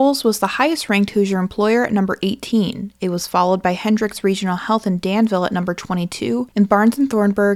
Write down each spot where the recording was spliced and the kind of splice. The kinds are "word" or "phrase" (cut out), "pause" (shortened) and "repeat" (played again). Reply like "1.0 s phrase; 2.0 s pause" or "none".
none